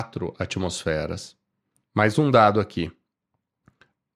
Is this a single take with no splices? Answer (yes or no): yes